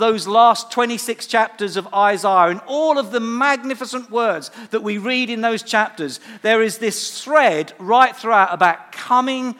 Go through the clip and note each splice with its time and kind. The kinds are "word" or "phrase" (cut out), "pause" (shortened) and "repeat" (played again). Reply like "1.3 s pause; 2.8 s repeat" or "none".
none

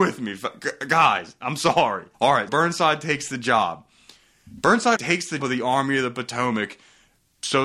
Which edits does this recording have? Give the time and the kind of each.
2.1 s pause; 2.5 s word; 5.0 s word; 5.4 s word

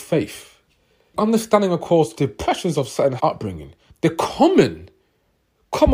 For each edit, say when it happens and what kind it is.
1.1 s word; 2.1 s word; 3.2 s word; 3.9 s word

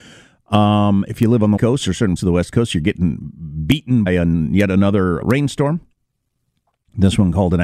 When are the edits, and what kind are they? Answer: 1.6 s word; 2.2 s word; 4.1 s word; 5.2 s word

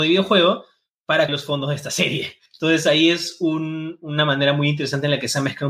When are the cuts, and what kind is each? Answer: 1.3 s word; 2.5 s pause

